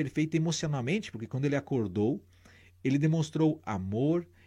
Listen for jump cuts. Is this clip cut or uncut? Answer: uncut